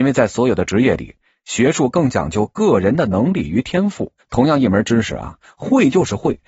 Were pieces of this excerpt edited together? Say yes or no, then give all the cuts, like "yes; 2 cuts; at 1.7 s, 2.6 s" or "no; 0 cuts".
yes; 1 cut; at 4.2 s